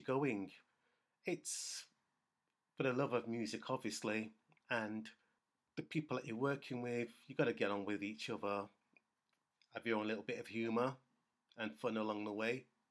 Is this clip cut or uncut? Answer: uncut